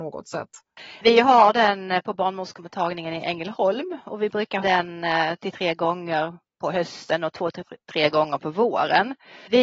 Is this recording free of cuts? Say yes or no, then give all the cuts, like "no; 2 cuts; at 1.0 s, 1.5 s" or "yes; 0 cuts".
no; 4 cuts; at 4.6 s, 5.4 s, 6.5 s, 7.8 s